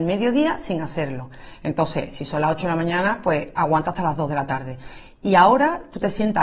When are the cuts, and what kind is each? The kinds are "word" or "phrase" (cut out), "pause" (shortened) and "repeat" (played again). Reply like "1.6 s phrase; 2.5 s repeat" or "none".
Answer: none